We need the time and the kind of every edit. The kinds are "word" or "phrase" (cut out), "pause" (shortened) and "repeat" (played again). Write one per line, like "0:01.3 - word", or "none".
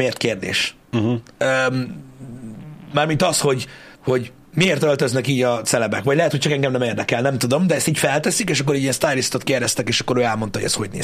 0:03.9 - pause